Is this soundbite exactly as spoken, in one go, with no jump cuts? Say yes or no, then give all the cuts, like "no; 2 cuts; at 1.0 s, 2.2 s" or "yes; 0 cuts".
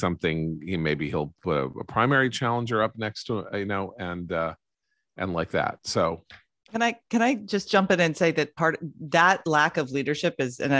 yes; 0 cuts